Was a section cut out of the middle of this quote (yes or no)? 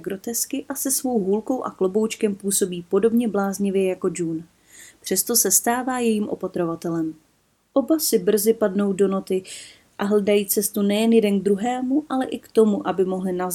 no